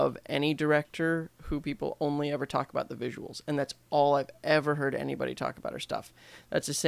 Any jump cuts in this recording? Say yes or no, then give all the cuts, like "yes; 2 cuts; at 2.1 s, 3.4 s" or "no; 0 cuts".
no; 0 cuts